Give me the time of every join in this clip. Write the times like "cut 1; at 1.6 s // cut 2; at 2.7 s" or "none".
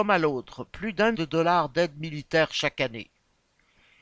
cut 1; at 1.1 s